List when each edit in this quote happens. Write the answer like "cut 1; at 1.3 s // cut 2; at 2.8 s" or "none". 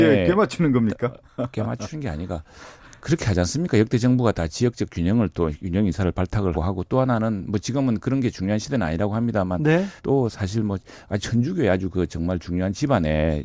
cut 1; at 2.8 s // cut 2; at 6.5 s // cut 3; at 10.0 s